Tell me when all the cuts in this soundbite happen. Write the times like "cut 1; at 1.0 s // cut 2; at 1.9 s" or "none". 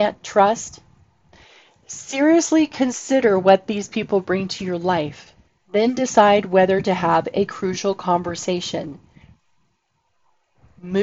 cut 1; at 5.5 s